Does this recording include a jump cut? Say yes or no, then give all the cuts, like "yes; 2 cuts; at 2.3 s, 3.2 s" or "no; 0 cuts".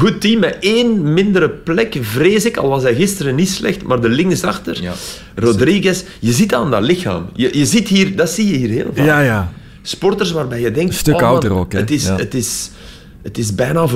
no; 0 cuts